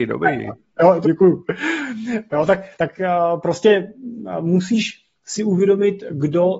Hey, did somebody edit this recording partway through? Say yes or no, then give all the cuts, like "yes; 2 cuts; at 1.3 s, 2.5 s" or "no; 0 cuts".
yes; 2 cuts; at 1.0 s, 2.7 s